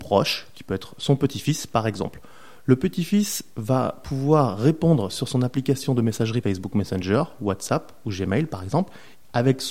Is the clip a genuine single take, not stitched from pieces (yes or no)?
no